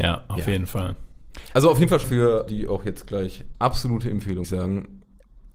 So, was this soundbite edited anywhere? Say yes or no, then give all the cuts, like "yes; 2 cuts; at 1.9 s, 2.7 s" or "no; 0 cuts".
yes; 4 cuts; at 2.0 s, 2.5 s, 3.5 s, 4.4 s